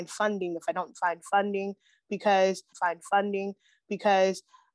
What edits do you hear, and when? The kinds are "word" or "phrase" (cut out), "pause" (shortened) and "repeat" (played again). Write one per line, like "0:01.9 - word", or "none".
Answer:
0:02.7 - repeat